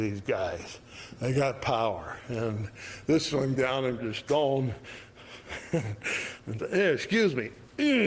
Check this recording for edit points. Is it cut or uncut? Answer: cut